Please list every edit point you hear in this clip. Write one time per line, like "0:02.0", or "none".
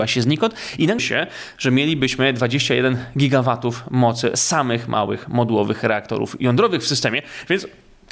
0:01.0